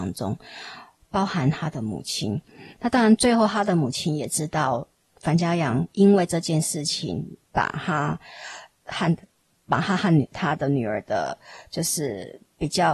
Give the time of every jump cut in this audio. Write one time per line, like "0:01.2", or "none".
0:02.7
0:05.1